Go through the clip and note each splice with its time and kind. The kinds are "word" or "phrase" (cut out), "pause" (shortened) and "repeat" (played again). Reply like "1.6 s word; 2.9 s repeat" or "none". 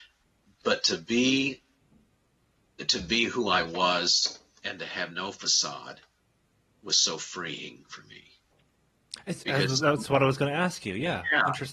none

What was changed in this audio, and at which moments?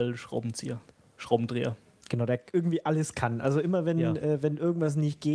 none

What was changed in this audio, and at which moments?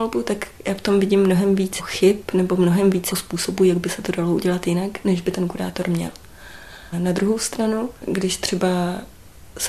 8.0 s pause

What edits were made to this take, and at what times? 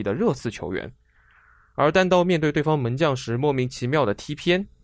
none

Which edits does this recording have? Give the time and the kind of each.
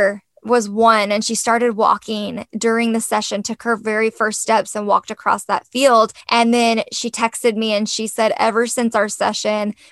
6.2 s pause

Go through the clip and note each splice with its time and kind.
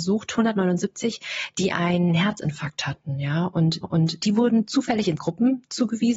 3.8 s repeat; 5.2 s word

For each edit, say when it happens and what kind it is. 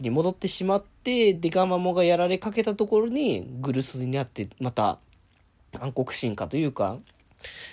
none

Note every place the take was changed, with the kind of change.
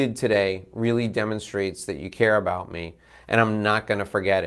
none

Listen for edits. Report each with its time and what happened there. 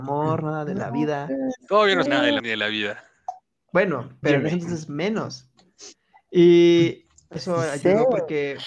2.1 s word; 2.4 s word; 4.2 s word; 7.4 s word

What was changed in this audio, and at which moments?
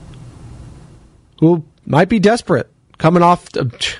none

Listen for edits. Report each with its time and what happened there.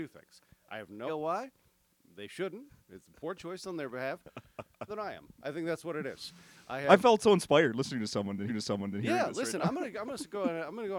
1.1 s word; 4.9 s phrase; 7.0 s word; 8.5 s repeat

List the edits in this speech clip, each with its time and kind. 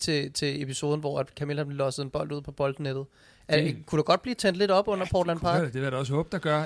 none

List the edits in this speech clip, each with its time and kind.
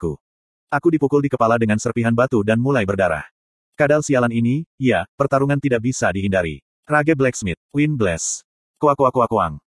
none

